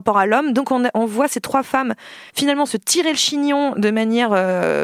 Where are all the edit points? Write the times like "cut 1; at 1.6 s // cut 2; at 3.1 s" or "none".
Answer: cut 1; at 2.3 s

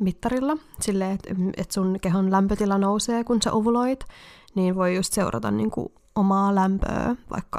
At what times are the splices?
none

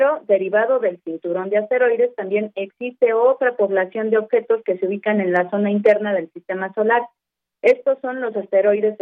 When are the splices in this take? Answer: none

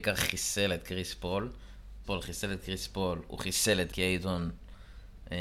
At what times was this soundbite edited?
cut 1; at 2.0 s // cut 2; at 3.9 s

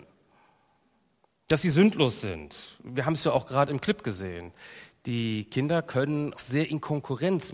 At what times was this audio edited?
cut 1; at 6.3 s

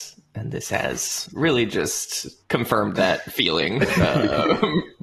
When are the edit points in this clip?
cut 1; at 2.4 s

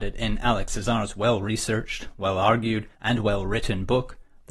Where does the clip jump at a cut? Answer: cut 1; at 2.9 s

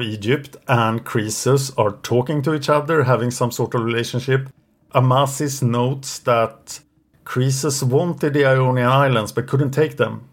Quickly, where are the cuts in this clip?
none

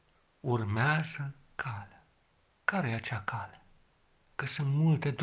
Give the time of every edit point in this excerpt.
cut 1; at 2.3 s

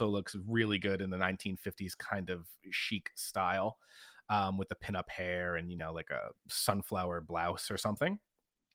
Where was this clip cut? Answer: none

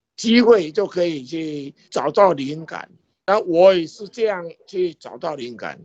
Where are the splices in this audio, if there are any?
cut 1; at 1.8 s // cut 2; at 3.0 s

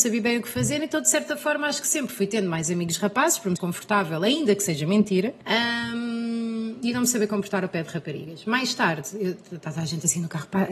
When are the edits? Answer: cut 1; at 3.6 s // cut 2; at 5.4 s

